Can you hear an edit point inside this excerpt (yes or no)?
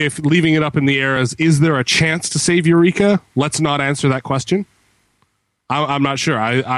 no